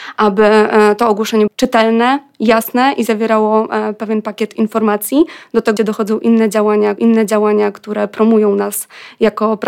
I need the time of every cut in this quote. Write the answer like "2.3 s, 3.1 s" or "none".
1.5 s, 5.8 s, 7.0 s